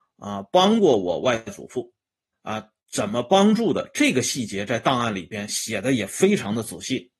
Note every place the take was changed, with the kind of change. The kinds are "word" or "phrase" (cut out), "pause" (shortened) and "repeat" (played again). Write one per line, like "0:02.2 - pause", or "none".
0:02.3 - phrase